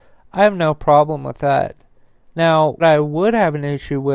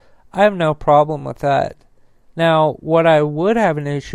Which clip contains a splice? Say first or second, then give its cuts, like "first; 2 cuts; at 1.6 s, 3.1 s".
first; 1 cut; at 2.8 s